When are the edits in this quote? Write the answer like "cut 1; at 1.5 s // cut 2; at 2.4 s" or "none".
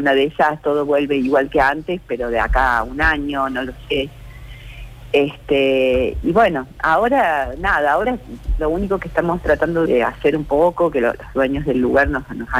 cut 1; at 6.2 s // cut 2; at 9.9 s